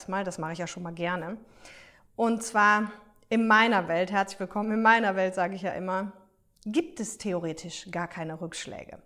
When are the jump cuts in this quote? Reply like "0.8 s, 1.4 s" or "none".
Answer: none